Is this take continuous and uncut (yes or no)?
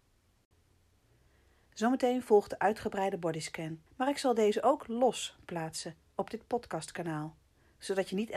no